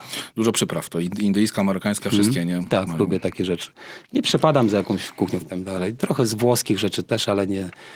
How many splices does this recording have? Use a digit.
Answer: 1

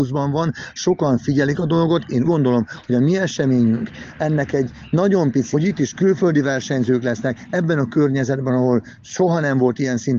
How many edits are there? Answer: 2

